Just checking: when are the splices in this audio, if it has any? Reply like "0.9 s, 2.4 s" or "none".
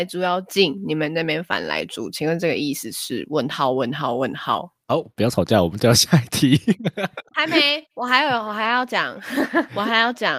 7.3 s